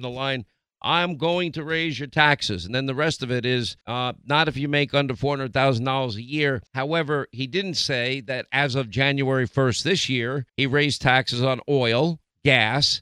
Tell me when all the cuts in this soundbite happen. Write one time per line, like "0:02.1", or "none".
0:03.8
0:06.7
0:10.5